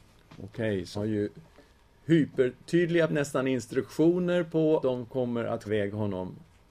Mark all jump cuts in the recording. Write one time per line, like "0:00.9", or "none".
0:00.9
0:03.1
0:04.8
0:05.7